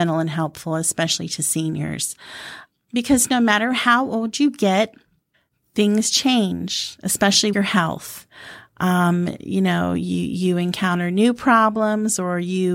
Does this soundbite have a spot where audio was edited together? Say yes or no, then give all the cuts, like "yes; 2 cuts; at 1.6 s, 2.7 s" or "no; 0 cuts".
yes; 1 cut; at 7.5 s